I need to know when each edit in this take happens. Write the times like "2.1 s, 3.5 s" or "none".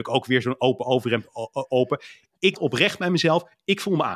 2.5 s

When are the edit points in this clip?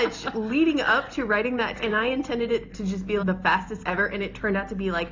1.8 s, 2.7 s, 3.2 s, 3.8 s

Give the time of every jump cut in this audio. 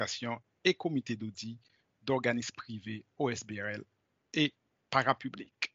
none

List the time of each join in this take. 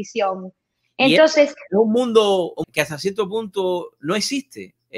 2.6 s

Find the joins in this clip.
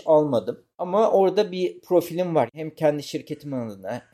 none

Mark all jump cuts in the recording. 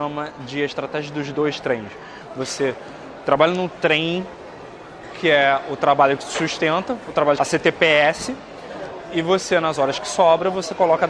7.4 s

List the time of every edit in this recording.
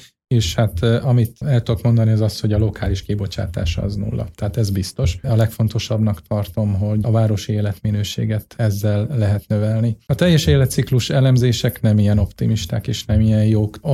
none

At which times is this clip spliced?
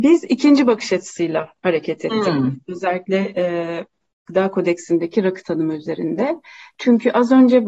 none

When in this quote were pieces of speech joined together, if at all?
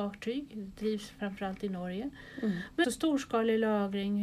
2.8 s

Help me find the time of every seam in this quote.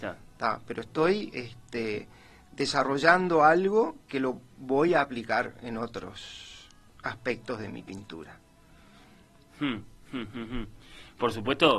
none

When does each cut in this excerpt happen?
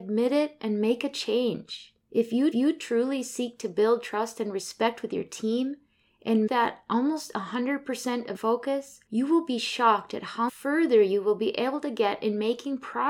2.0 s, 2.5 s, 6.5 s, 8.3 s, 9.1 s, 10.5 s

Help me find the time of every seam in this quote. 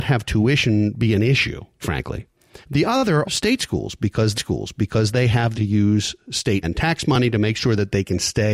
1.8 s, 2.6 s, 3.2 s, 4.3 s, 5.5 s, 6.6 s

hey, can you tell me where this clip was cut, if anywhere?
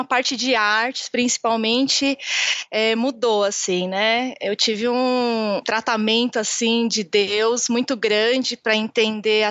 3.0 s, 5.6 s

